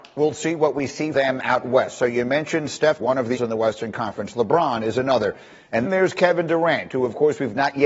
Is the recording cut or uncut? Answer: cut